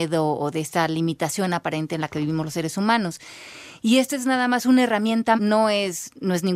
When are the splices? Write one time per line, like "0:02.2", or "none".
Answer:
0:05.4